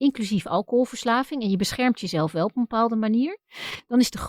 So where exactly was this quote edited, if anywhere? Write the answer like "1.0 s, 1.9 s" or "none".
none